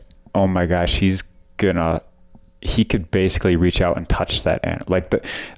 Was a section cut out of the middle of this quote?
no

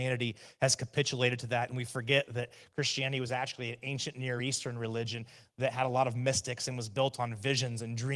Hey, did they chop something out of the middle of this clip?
no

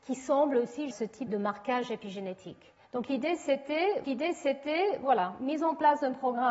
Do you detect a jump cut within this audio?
yes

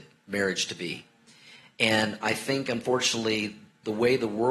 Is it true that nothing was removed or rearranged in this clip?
yes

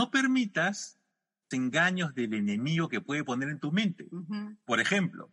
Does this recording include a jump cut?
yes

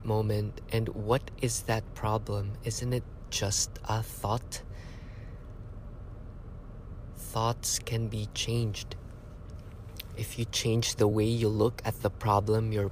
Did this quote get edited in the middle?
no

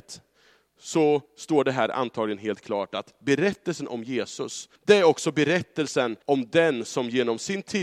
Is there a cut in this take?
yes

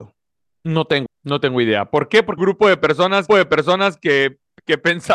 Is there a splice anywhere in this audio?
yes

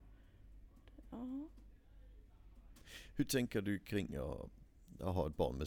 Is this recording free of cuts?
yes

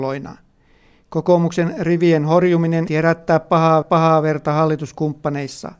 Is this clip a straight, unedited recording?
no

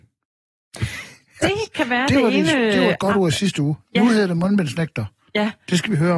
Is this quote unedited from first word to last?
yes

